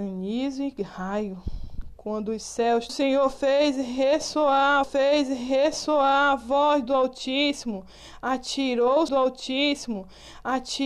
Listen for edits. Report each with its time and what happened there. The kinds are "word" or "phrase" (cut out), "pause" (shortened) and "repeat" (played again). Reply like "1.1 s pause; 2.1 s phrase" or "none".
2.9 s phrase; 4.8 s repeat; 9.1 s repeat